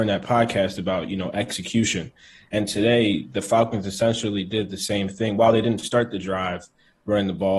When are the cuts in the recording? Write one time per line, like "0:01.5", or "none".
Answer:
none

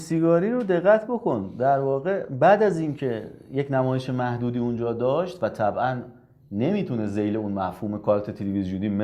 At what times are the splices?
none

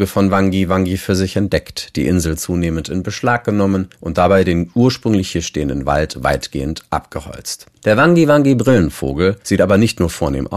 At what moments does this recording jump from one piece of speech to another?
0:03.9
0:07.8
0:09.4

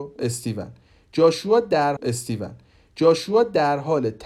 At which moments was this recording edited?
0:02.0

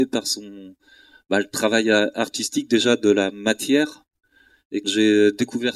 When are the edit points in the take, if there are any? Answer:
0:04.8

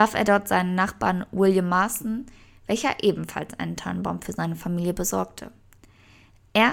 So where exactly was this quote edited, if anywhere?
none

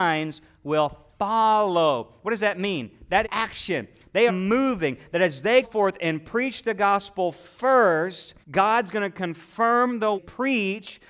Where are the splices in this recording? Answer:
0:03.2
0:04.3
0:05.6
0:08.4
0:10.2

